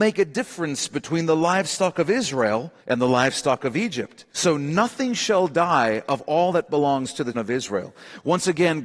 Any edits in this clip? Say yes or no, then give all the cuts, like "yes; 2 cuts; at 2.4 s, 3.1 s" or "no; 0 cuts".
yes; 3 cuts; at 2.8 s, 4.3 s, 7.3 s